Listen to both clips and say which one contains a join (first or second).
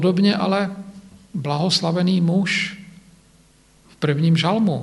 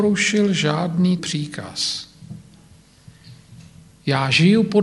second